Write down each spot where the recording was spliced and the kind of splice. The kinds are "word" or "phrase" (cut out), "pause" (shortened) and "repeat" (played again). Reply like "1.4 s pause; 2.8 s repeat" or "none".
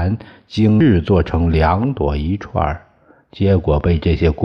none